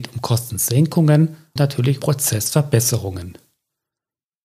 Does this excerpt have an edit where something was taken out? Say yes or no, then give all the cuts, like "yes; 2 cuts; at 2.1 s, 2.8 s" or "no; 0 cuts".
yes; 2 cuts; at 1.6 s, 2.0 s